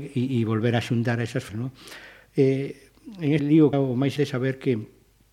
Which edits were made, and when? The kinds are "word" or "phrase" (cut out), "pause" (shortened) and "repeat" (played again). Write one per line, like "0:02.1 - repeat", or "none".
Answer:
0:01.5 - word
0:03.4 - word
0:03.7 - word
0:04.2 - word